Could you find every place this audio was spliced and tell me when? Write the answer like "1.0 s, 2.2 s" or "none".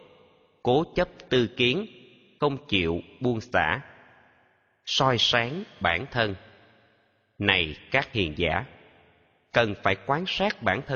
none